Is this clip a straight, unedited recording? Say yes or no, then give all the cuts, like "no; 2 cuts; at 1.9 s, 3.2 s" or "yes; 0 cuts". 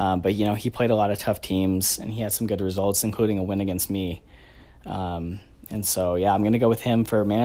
yes; 0 cuts